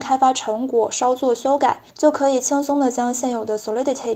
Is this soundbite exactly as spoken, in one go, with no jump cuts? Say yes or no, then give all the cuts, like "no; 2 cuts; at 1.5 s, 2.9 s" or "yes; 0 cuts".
no; 1 cut; at 1.9 s